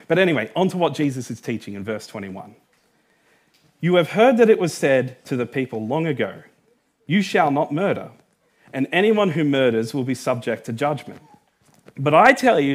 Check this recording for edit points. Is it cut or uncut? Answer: uncut